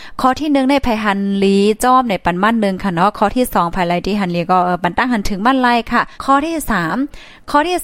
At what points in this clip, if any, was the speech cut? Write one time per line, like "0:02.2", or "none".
0:06.1